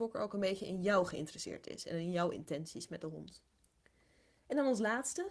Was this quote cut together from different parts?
no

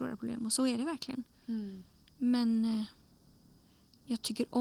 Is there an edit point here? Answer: no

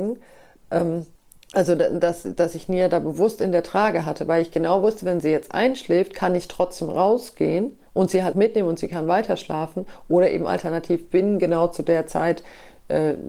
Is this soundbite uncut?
no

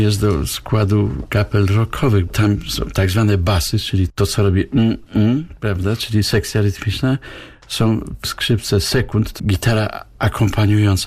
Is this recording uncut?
no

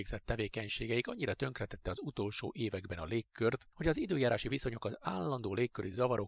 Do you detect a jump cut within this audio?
no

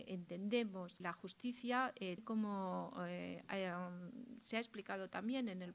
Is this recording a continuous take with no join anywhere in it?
no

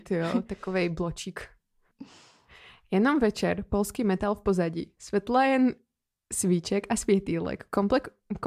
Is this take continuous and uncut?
yes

